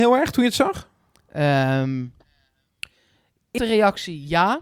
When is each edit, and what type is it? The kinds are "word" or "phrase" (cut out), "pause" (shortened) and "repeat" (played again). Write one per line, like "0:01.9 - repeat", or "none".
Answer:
0:03.6 - word